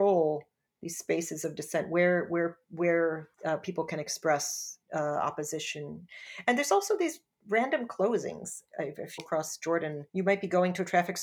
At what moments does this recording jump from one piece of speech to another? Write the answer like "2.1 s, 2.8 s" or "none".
3.3 s, 4.8 s, 9.2 s, 10.1 s

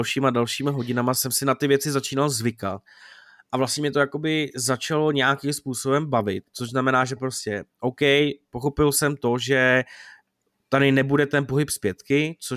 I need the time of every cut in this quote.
none

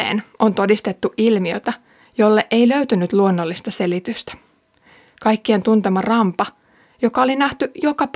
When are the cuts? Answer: none

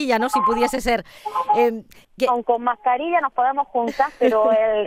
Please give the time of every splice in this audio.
none

